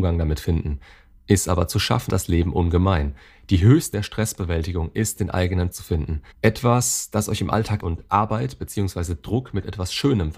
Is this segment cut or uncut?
cut